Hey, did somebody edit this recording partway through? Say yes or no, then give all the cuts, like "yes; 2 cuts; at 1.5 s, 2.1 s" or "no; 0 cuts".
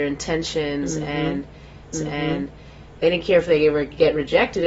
yes; 1 cut; at 1.9 s